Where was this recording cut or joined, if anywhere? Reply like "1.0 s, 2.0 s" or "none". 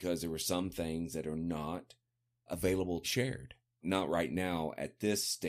2.5 s, 3.0 s, 3.8 s